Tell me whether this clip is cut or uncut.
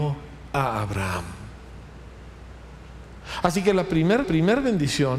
cut